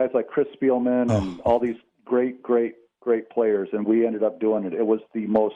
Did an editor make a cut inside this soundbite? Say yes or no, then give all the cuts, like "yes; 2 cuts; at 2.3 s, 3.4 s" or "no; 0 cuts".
no; 0 cuts